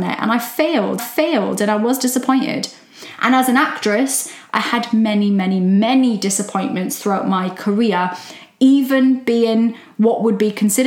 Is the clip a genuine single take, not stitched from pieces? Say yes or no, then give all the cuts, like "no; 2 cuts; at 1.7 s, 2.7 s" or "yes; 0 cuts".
no; 1 cut; at 1.0 s